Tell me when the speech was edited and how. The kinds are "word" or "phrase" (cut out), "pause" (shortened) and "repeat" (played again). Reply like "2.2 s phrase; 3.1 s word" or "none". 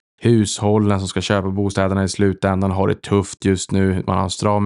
none